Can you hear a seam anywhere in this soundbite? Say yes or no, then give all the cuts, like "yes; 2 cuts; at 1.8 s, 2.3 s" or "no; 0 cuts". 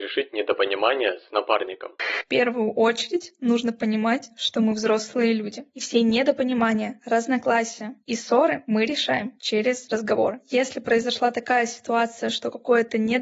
no; 0 cuts